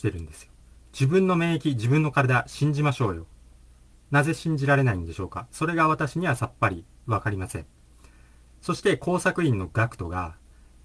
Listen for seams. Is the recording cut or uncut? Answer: uncut